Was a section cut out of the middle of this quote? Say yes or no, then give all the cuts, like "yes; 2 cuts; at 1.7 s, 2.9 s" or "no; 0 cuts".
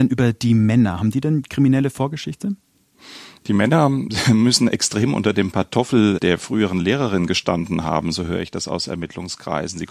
no; 0 cuts